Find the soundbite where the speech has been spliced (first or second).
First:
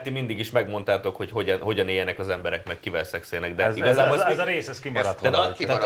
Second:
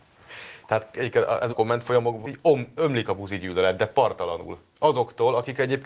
second